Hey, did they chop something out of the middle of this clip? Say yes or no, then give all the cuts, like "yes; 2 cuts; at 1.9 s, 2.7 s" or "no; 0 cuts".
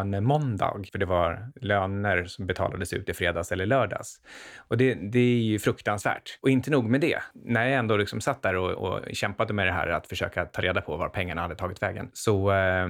no; 0 cuts